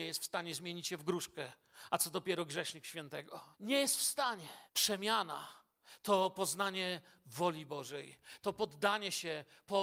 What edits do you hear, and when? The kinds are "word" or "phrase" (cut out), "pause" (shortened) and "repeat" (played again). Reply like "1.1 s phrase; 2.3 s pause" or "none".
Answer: 3.5 s pause; 4.7 s pause